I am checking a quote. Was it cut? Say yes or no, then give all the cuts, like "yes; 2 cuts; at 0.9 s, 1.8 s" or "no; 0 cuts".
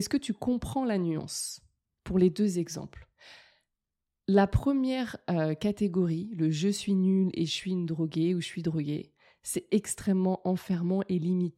no; 0 cuts